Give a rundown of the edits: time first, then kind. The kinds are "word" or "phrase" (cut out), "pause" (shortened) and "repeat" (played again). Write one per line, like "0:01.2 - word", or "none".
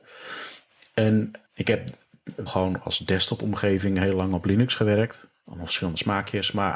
0:01.4 - word
0:02.5 - word